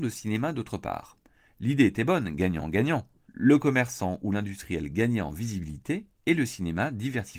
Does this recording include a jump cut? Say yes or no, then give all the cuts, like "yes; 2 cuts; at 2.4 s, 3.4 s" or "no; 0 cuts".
no; 0 cuts